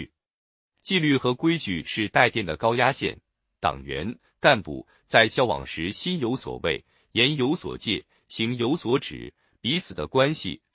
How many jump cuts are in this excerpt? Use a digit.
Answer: 0